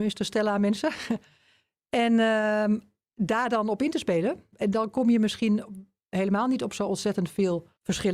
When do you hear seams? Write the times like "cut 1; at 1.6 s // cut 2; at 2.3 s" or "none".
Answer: none